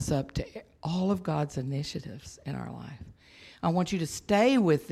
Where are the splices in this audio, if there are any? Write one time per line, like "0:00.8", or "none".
none